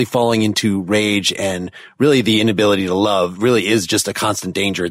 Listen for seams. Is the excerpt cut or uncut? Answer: uncut